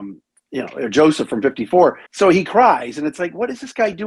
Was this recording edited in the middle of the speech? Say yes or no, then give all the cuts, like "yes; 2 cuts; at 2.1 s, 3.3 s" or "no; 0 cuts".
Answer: yes; 1 cut; at 2.1 s